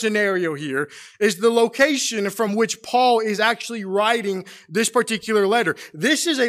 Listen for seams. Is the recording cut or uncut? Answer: uncut